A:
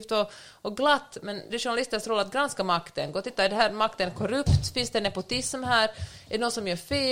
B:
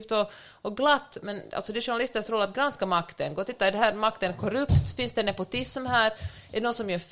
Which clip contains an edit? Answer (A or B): A